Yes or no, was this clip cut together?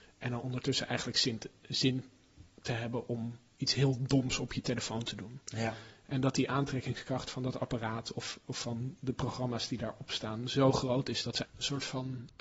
yes